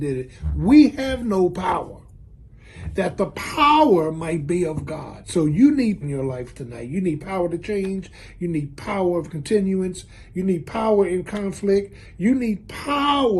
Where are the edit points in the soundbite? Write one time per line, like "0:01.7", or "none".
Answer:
0:06.0